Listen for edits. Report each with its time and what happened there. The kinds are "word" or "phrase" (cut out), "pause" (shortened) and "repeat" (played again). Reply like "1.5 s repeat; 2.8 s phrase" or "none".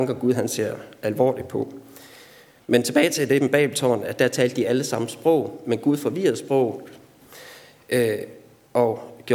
none